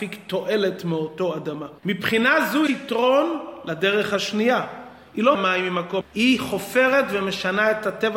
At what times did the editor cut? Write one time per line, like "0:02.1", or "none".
0:01.8
0:02.7
0:05.3
0:06.0

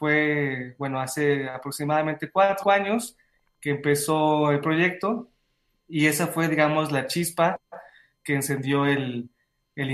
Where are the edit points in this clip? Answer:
0:02.6

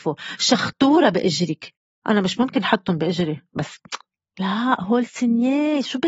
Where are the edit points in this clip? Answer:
none

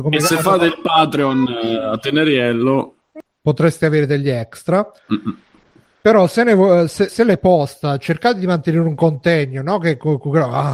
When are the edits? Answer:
0:07.1

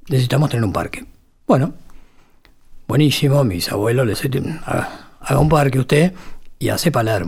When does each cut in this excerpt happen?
0:04.1

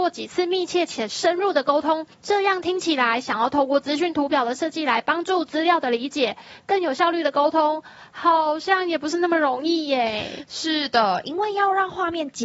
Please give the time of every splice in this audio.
0:02.1

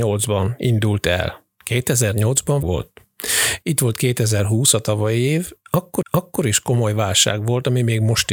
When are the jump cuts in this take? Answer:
0:02.6
0:06.0

